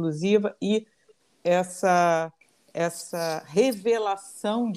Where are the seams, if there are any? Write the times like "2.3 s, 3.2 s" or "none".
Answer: 1.3 s